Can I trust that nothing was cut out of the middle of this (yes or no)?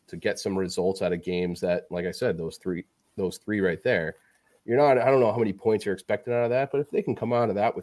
yes